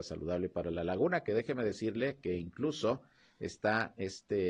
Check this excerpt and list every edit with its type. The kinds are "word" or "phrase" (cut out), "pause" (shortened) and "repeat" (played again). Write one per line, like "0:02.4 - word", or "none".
none